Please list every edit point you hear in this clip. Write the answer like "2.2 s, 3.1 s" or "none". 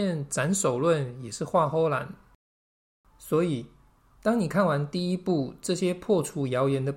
none